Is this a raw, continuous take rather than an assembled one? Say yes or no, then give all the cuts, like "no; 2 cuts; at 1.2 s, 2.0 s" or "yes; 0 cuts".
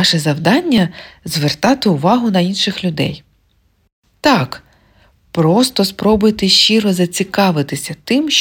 yes; 0 cuts